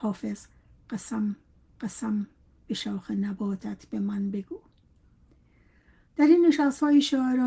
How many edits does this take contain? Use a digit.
1